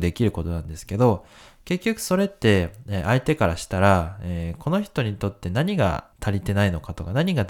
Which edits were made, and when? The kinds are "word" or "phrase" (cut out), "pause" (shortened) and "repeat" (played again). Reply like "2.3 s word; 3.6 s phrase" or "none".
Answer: 6.1 s pause